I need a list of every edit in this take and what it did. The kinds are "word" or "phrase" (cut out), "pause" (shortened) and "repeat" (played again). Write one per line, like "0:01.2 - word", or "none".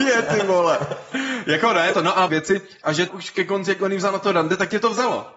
0:01.9 - word
0:02.3 - phrase
0:03.1 - word